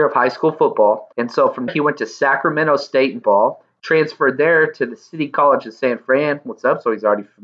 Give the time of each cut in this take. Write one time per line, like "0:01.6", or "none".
0:01.1
0:01.7
0:03.2